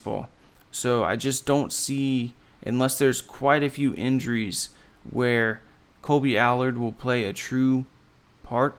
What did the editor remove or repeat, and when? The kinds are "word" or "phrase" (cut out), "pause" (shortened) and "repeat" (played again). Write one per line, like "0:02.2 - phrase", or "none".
none